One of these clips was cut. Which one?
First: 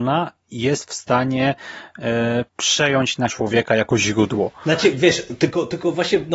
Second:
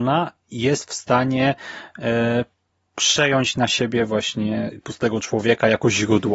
first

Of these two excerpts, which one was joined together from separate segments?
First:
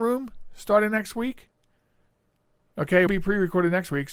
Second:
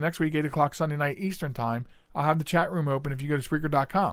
first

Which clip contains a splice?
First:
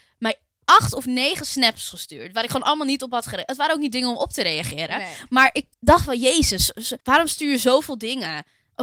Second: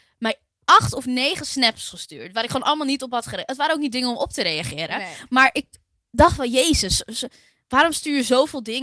first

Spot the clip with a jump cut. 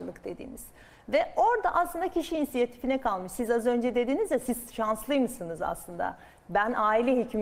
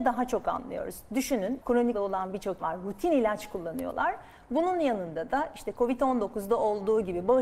second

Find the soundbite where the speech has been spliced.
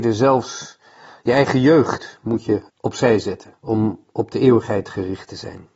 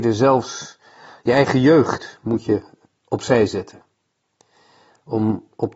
first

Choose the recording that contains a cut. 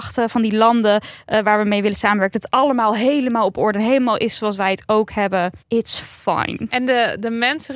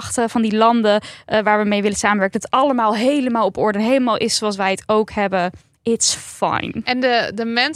first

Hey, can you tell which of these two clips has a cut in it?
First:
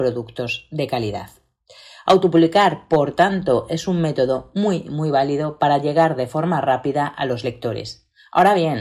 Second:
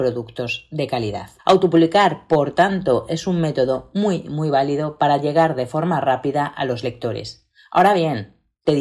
second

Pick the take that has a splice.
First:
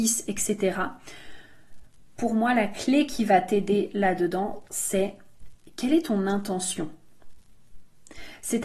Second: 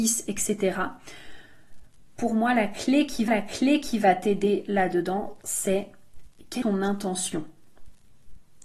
second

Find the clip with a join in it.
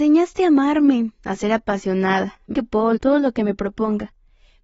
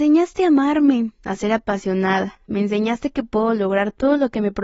first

